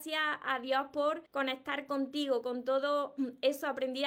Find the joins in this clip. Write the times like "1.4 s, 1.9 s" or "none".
1.3 s